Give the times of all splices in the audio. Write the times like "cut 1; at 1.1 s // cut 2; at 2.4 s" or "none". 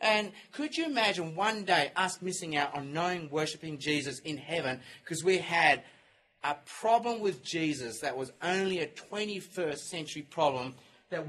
none